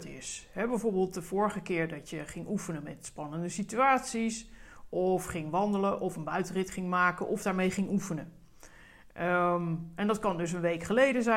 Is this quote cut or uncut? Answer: uncut